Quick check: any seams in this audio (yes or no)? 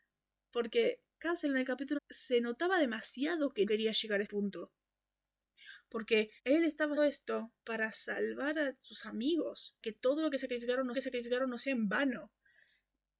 yes